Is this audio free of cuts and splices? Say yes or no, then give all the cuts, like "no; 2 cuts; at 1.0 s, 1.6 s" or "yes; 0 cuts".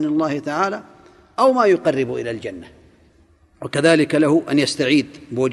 yes; 0 cuts